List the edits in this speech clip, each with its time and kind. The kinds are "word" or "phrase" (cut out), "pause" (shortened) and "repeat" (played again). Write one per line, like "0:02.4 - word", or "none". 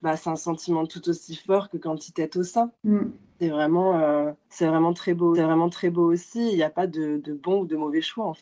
0:02.7 - pause
0:04.4 - pause
0:05.3 - repeat